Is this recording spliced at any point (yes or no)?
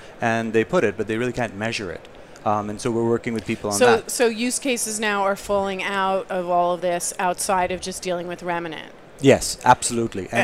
no